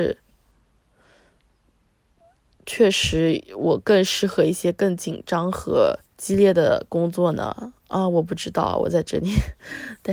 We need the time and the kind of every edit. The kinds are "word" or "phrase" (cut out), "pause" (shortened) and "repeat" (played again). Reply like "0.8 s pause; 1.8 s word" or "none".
6.1 s pause; 7.8 s pause

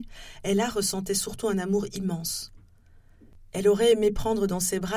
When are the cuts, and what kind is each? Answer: none

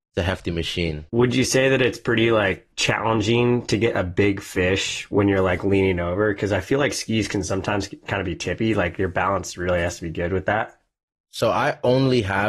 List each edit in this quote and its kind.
1.1 s pause; 2.7 s pause

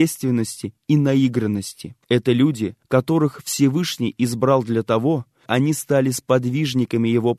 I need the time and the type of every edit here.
2.0 s pause; 5.5 s word

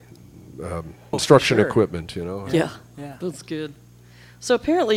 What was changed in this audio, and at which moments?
1.1 s word

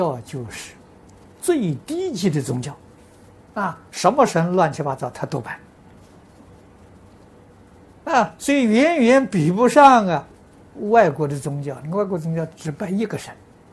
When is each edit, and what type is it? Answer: 8.0 s pause

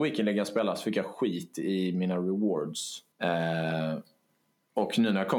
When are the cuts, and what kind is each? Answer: 3.1 s pause

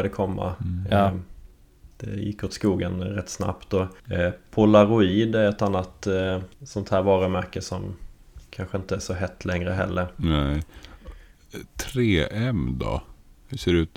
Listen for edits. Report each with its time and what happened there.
1.9 s pause; 4.0 s pause; 6.5 s pause

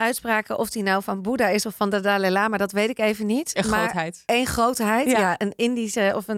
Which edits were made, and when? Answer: none

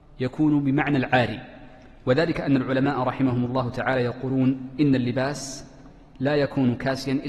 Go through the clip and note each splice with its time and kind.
2.0 s pause

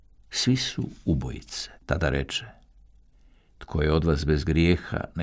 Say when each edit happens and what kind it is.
1.8 s pause

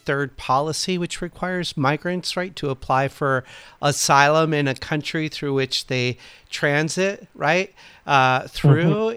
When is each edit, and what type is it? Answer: none

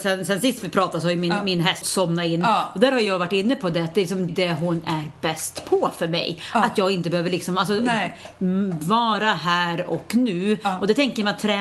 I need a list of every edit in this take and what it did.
1.8 s word; 4.3 s word

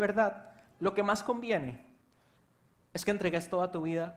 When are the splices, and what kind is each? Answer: none

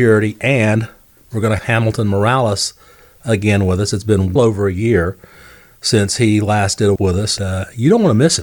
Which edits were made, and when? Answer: 1.6 s word; 4.4 s word; 7.0 s word; 7.4 s word

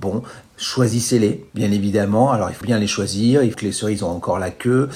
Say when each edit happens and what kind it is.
1.5 s pause; 2.6 s word; 3.5 s word

